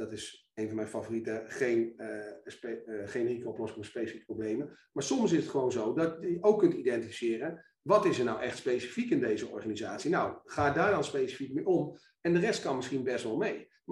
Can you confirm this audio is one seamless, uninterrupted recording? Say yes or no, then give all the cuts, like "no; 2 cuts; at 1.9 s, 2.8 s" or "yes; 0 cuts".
yes; 0 cuts